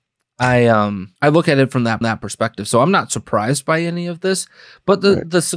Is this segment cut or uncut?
cut